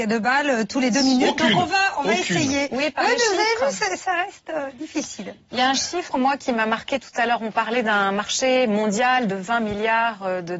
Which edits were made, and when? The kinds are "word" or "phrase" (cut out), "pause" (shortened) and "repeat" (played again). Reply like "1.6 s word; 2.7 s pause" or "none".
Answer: none